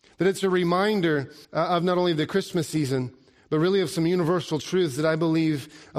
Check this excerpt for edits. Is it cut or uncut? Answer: cut